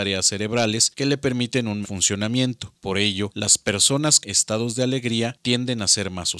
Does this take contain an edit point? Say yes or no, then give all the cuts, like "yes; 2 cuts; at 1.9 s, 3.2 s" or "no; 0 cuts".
yes; 2 cuts; at 1.8 s, 4.2 s